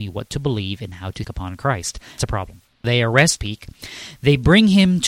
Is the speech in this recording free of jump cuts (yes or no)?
no